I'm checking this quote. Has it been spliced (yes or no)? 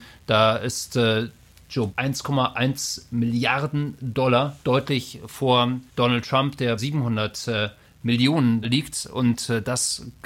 yes